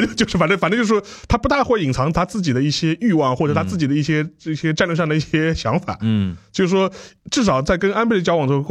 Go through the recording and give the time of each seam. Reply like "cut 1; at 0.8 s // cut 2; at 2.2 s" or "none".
cut 1; at 7.2 s